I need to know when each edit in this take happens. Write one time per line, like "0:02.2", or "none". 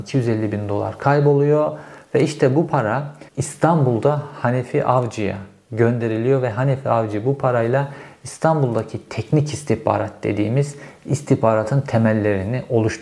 0:03.3